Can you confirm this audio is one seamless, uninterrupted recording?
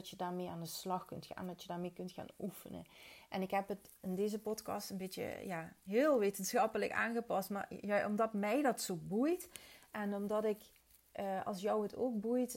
yes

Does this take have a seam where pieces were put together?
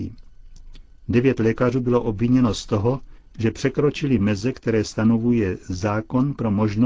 no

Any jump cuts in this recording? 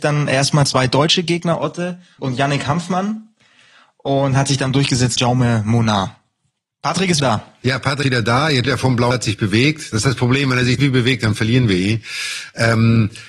yes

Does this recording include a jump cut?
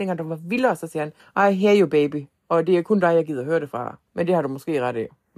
yes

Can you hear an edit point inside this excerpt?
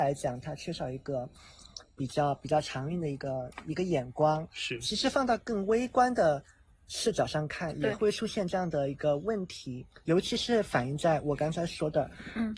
no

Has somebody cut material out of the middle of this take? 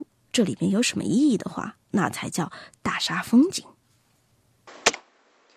yes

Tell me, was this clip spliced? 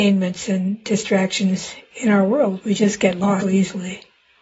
yes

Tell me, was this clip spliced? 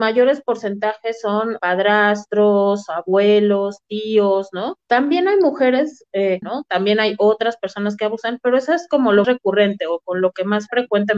yes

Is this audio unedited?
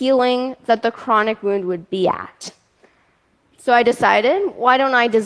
yes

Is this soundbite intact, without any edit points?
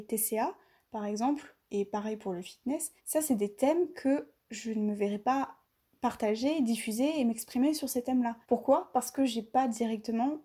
no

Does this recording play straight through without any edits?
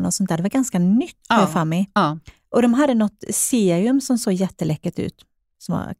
yes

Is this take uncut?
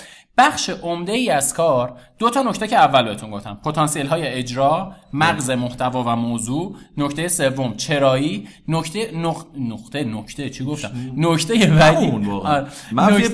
yes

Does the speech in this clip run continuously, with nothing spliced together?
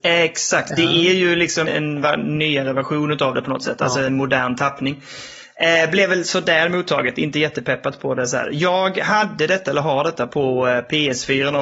no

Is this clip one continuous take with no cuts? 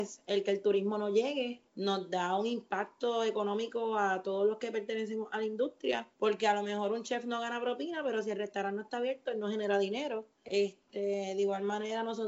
no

